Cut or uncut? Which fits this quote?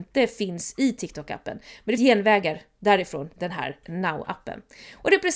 cut